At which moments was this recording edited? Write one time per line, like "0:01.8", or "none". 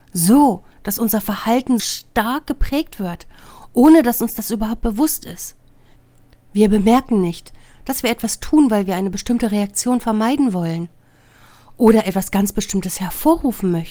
0:01.8